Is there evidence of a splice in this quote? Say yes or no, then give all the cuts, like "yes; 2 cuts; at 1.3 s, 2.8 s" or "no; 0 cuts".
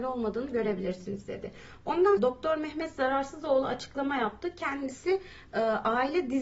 yes; 1 cut; at 2.2 s